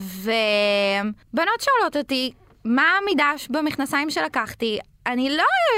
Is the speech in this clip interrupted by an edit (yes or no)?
yes